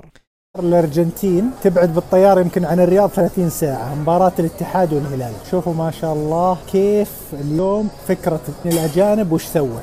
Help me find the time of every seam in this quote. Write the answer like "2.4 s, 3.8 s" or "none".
8.6 s